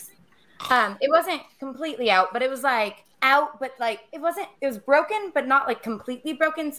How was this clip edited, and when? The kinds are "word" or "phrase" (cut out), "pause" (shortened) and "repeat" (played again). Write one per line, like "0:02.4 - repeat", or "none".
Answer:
0:03.1 - pause
0:04.5 - pause